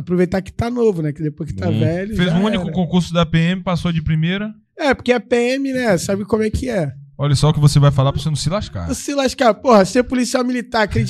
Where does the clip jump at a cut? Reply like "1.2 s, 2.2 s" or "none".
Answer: none